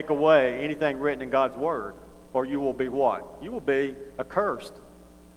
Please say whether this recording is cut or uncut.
uncut